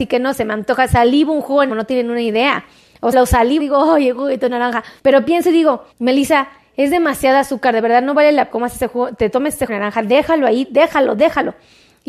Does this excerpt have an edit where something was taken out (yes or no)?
yes